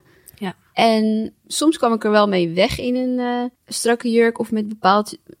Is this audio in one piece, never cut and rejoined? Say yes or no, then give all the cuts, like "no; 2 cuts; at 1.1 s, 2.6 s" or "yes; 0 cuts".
no; 2 cuts; at 1.4 s, 3.5 s